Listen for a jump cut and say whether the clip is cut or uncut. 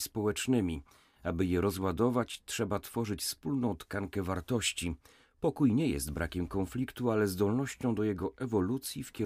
uncut